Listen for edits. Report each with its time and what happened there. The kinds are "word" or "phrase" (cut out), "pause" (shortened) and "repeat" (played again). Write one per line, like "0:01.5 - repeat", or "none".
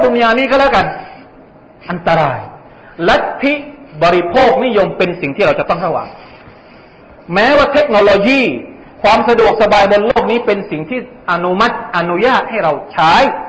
none